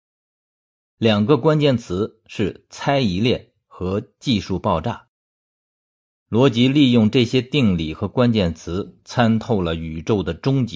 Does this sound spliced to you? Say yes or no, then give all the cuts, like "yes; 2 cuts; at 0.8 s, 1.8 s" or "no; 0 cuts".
no; 0 cuts